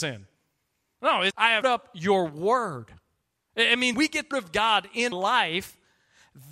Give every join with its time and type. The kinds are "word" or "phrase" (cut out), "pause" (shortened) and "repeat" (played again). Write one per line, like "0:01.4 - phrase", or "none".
0:01.3 - word
0:01.6 - word
0:03.9 - word
0:04.3 - word
0:05.1 - word